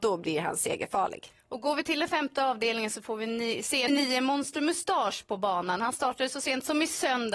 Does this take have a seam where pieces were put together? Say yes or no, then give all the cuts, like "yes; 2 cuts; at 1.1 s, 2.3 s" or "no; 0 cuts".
yes; 1 cut; at 3.9 s